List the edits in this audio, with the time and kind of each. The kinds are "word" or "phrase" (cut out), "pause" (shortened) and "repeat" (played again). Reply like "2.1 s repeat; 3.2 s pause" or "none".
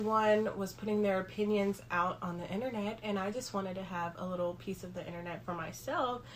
none